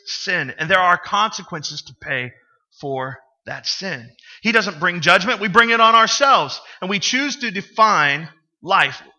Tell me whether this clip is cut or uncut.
uncut